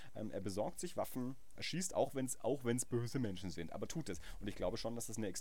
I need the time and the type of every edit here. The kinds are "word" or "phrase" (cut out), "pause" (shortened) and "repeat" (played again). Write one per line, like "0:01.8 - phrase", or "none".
0:01.6 - word
0:03.9 - phrase